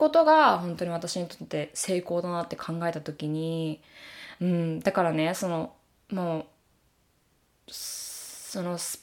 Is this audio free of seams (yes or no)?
yes